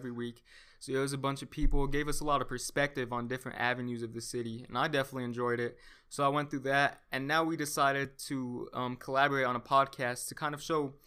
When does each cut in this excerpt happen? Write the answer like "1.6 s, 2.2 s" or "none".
none

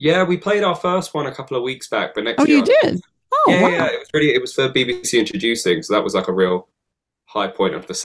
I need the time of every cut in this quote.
none

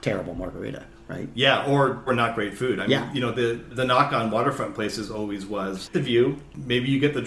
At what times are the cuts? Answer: 2.1 s, 5.9 s

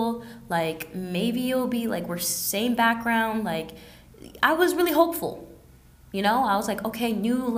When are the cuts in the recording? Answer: none

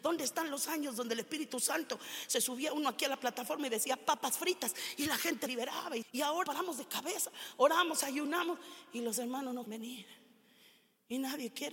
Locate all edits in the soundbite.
5.5 s, 6.0 s, 6.4 s, 9.7 s

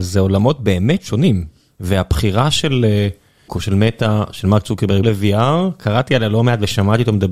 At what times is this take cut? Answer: 3.5 s, 5.0 s

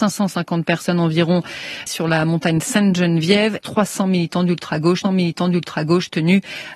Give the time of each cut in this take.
1.9 s, 3.6 s, 5.0 s

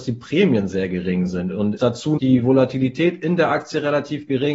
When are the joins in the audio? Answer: 1.8 s, 2.2 s

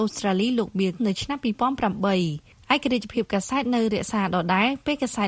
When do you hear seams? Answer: 1.0 s

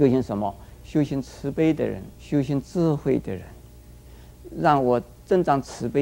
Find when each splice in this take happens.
2.1 s

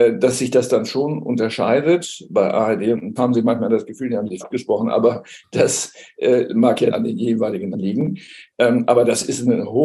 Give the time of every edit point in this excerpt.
3.2 s, 4.4 s, 6.9 s, 7.7 s

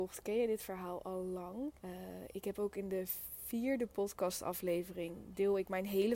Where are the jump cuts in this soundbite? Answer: 1.8 s

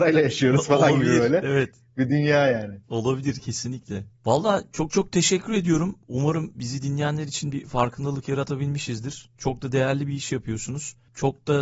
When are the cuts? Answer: 2.8 s, 6.0 s

